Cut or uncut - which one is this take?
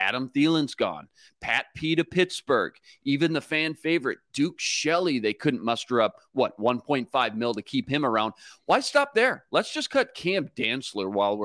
uncut